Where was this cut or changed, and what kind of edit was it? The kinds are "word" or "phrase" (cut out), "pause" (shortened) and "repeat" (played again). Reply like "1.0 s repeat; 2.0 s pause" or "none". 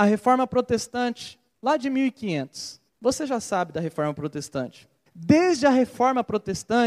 1.5 s pause; 2.9 s pause; 5.1 s pause